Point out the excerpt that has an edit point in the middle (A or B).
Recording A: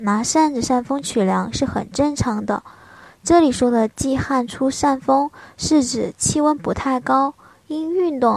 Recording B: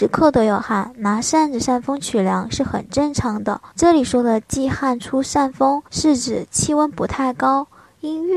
B